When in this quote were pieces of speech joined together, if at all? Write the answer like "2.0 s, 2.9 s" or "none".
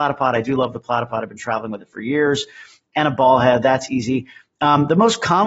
none